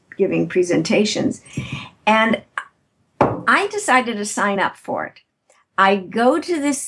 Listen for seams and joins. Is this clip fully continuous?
yes; 0 cuts

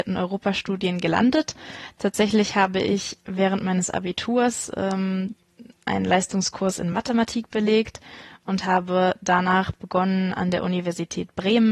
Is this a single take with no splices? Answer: yes; 0 cuts

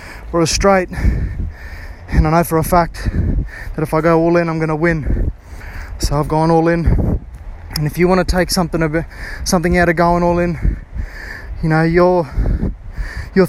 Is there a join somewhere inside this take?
no; 0 cuts

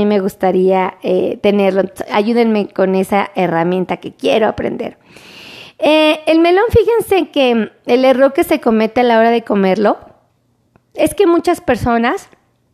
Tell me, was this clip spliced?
no; 0 cuts

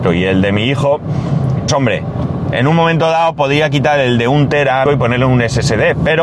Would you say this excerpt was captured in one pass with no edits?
no; 3 cuts; at 1.7 s, 2.5 s, 4.9 s

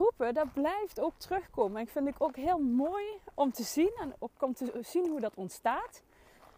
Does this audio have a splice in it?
no; 0 cuts

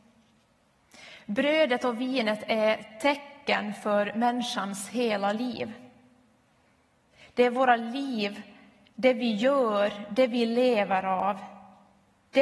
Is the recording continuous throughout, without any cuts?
yes; 0 cuts

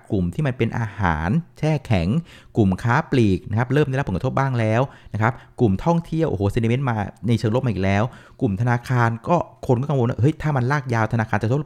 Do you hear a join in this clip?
no; 0 cuts

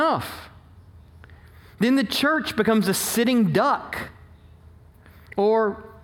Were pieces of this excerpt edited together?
no; 0 cuts

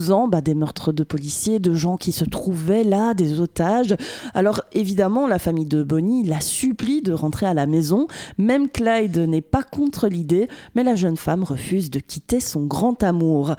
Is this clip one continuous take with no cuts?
yes; 0 cuts

